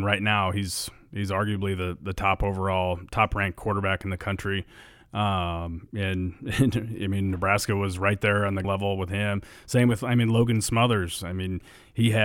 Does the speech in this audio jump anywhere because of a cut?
yes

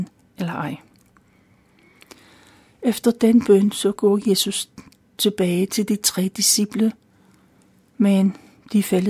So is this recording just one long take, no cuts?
yes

